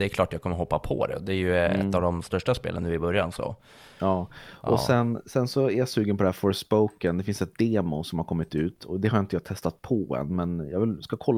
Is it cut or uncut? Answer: uncut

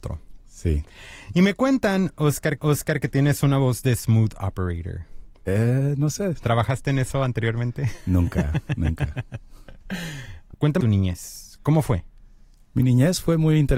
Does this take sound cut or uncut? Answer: cut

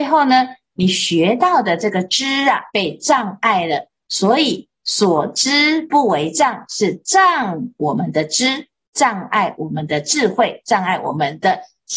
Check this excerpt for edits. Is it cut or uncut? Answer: cut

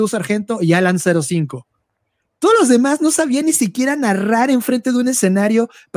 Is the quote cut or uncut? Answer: uncut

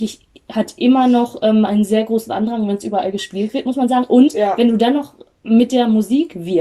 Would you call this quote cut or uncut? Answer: uncut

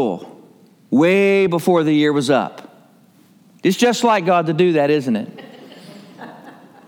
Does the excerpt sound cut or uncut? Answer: uncut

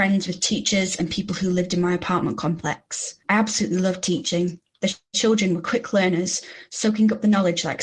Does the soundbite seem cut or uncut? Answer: cut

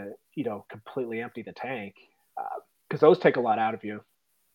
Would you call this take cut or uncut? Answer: uncut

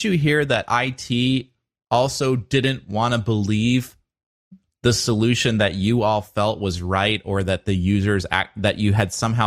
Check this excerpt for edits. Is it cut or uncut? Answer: uncut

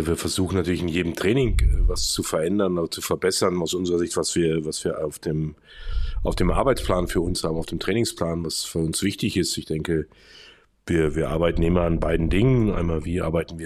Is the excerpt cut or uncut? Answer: uncut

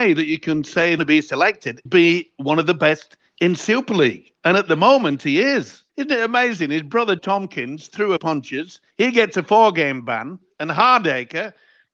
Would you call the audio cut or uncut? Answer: cut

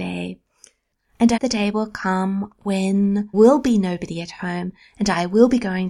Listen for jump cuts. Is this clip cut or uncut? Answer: cut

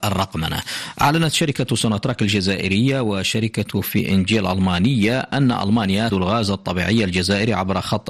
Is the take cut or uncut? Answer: cut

